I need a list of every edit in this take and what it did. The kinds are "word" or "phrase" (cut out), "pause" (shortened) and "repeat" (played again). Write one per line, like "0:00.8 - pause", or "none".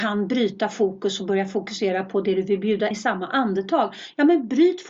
0:02.9 - word